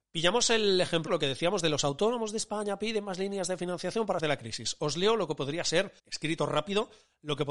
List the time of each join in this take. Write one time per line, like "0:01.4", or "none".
0:01.1
0:04.2
0:06.0